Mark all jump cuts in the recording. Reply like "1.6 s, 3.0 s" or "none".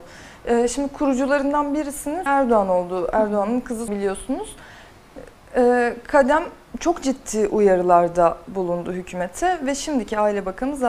2.3 s, 3.9 s